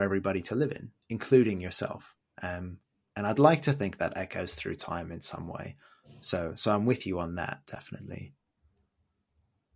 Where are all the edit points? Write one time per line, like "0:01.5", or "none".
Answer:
none